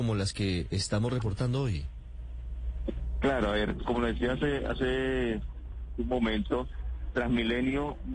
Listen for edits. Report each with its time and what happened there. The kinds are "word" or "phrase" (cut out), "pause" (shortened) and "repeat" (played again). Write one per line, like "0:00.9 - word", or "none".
0:03.8 - word